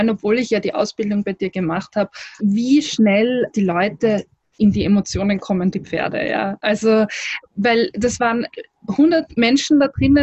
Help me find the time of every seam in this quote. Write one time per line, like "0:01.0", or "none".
0:02.4
0:03.5
0:05.7
0:07.5